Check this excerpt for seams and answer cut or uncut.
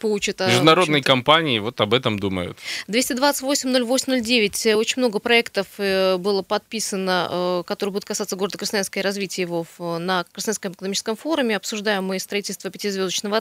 uncut